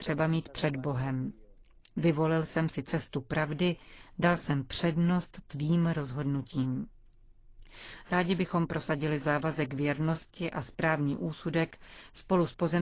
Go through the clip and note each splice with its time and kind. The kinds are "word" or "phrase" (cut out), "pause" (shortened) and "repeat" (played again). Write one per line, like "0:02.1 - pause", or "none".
none